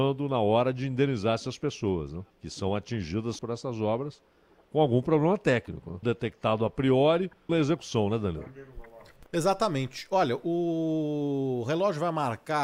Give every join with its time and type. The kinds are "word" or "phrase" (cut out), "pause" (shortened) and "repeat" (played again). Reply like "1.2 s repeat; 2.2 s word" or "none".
2.3 s pause; 3.4 s phrase; 6.0 s word; 7.5 s word